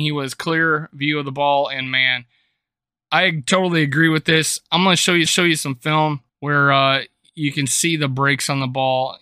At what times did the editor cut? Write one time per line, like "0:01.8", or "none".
0:05.3
0:06.3